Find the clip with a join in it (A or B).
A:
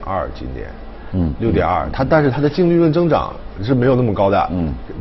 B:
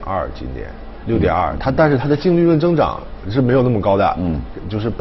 B